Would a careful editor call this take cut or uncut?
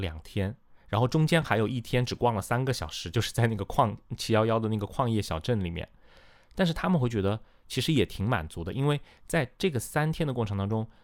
uncut